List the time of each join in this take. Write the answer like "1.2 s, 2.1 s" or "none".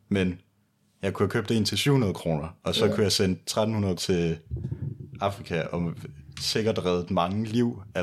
4.0 s